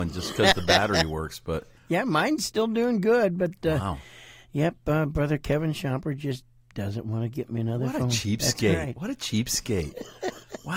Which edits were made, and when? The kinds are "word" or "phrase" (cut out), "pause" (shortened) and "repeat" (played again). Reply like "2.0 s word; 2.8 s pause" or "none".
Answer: 1.8 s pause

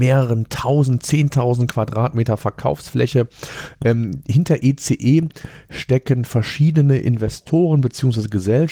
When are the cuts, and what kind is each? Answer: none

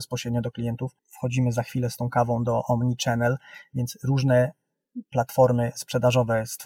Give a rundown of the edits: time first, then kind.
1.0 s pause

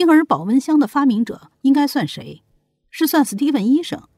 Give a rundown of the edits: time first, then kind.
none

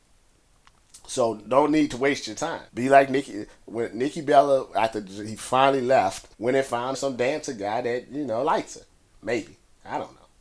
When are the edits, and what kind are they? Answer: 2.7 s pause; 6.3 s pause; 6.9 s word

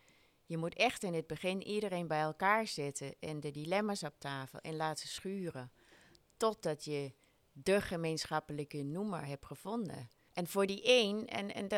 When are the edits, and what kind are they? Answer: 7.3 s pause; 10.3 s pause

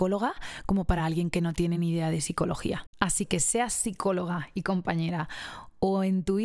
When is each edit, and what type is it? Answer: none

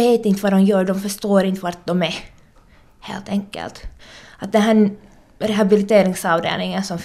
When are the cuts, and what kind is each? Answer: none

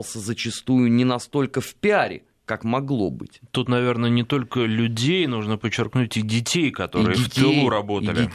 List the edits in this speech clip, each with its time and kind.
none

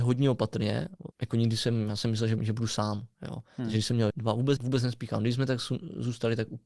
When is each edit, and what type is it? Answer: 1.1 s pause; 2.4 s word; 4.1 s word; 4.6 s phrase

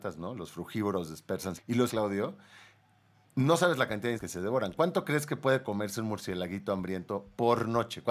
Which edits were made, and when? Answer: 1.6 s word; 1.9 s word; 4.2 s word

